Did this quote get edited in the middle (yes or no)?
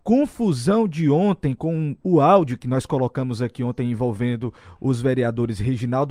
no